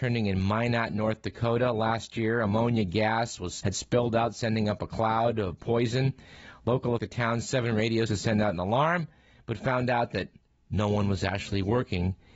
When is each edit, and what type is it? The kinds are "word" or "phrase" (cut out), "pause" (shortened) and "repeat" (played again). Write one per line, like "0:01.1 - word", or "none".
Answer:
0:03.6 - word
0:07.0 - phrase
0:08.1 - word